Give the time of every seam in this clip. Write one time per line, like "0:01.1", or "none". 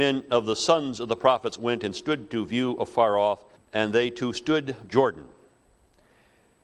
0:03.6
0:04.9